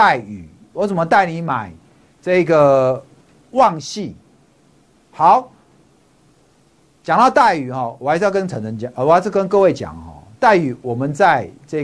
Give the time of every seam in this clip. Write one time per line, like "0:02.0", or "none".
none

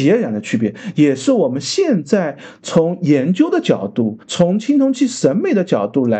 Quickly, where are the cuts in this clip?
0:04.2

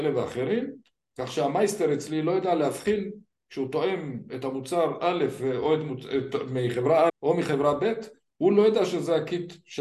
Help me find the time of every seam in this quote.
0:07.1

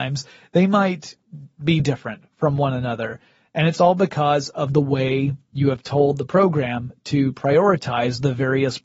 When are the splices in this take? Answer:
0:01.8

